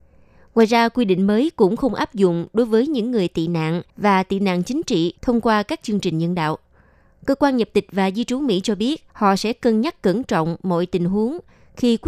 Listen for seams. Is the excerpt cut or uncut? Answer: cut